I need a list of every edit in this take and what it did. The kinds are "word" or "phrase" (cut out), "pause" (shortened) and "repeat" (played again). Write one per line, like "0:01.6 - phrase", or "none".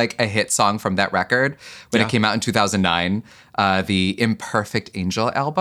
none